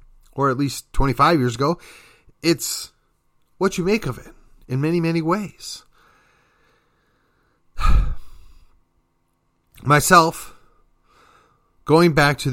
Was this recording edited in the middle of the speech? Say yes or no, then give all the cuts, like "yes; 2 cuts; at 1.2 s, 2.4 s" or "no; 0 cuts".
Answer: no; 0 cuts